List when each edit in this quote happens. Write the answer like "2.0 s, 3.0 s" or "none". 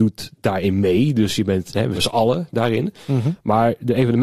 1.9 s